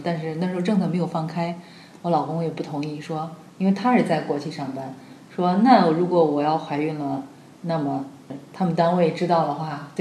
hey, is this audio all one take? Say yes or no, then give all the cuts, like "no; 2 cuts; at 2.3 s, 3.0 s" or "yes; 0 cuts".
yes; 0 cuts